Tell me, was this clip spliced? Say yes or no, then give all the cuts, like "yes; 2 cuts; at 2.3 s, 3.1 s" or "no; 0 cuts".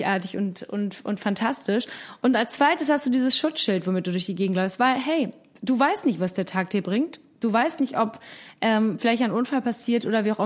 no; 0 cuts